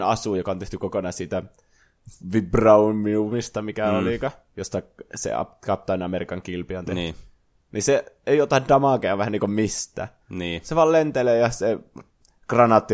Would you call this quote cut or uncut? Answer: uncut